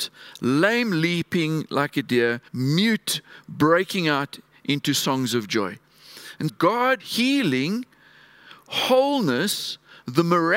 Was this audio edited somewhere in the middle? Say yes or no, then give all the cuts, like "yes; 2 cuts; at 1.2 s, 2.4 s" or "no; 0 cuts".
yes; 3 cuts; at 2.5 s, 6.5 s, 7.0 s